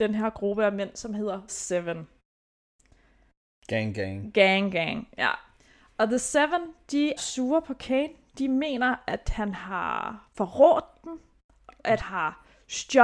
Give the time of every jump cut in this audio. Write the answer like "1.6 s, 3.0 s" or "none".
1.5 s, 7.2 s, 12.0 s